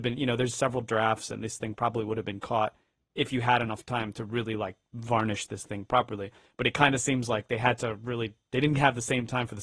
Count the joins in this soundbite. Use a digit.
0